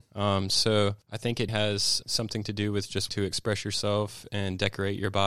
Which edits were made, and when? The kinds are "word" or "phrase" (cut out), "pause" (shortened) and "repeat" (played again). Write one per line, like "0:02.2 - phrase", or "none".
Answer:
0:01.0 - pause
0:01.5 - word
0:02.0 - word
0:03.1 - word